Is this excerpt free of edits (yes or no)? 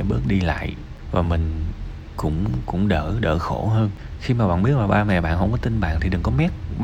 yes